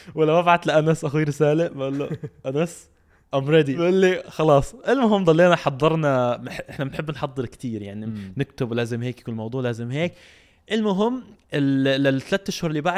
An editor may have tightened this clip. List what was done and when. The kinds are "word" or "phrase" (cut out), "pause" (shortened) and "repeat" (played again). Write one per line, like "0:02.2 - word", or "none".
none